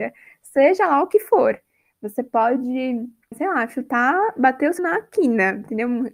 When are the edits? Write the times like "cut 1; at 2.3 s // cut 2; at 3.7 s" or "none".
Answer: cut 1; at 3.3 s // cut 2; at 4.8 s

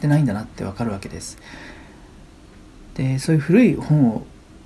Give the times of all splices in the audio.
none

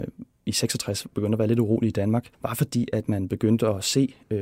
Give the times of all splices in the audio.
cut 1; at 2.3 s

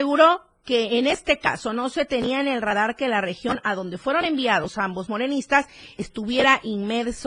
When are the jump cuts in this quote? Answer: none

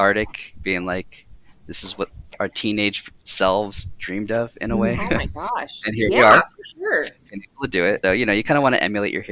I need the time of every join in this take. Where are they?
cut 1; at 8.0 s

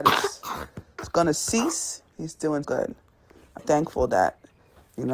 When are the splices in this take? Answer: cut 1; at 2.6 s // cut 2; at 3.6 s

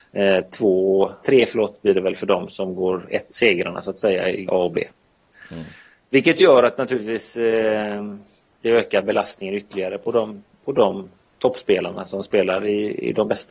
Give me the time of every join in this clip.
cut 1; at 1.2 s // cut 2; at 2.5 s // cut 3; at 4.5 s

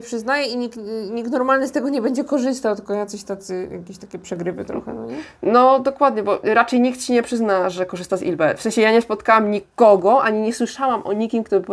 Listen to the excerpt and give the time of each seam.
none

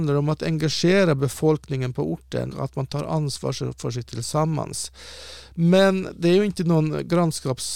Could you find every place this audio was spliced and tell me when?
cut 1; at 2.5 s // cut 2; at 4.1 s

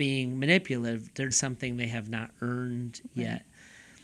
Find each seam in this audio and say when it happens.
cut 1; at 1.3 s

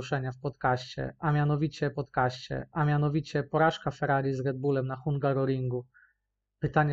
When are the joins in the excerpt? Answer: cut 1; at 1.9 s

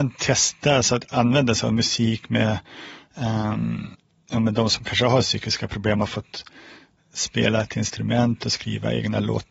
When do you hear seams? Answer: none

